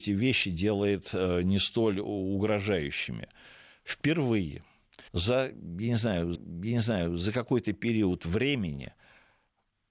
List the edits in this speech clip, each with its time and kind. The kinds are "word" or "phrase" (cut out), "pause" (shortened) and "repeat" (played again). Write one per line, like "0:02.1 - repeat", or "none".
0:05.1 - pause
0:06.3 - repeat